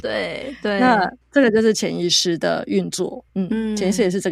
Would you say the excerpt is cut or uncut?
cut